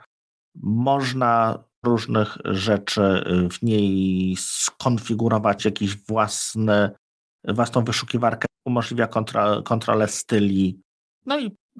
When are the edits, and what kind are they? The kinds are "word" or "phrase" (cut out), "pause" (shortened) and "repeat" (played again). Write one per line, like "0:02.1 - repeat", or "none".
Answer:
0:01.8 - word
0:05.6 - word
0:08.4 - word